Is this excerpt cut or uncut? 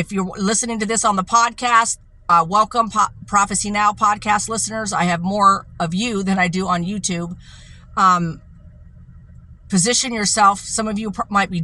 uncut